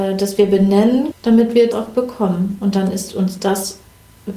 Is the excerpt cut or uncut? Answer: cut